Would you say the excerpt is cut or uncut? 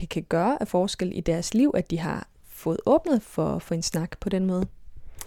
uncut